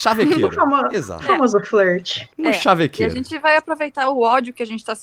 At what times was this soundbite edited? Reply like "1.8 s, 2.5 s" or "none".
2.3 s